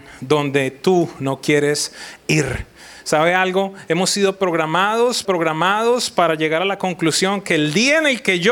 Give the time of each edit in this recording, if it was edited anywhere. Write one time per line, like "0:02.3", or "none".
0:05.2